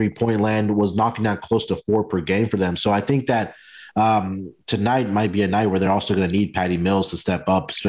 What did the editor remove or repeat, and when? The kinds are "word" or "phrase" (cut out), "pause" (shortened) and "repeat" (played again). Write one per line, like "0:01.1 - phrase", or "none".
none